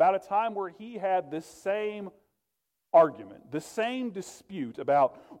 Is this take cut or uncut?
uncut